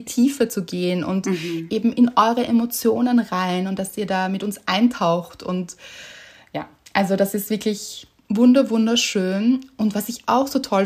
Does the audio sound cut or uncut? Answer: uncut